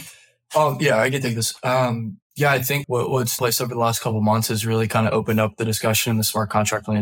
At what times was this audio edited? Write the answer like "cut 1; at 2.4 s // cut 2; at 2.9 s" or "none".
cut 1; at 2.3 s // cut 2; at 2.8 s // cut 3; at 3.4 s